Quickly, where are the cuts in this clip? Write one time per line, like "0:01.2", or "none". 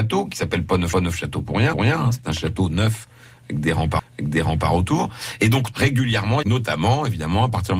0:00.9
0:01.7
0:04.0
0:05.7
0:06.4